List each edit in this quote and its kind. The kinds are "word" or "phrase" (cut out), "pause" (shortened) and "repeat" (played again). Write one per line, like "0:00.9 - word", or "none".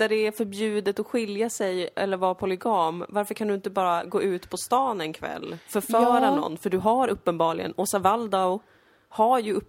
none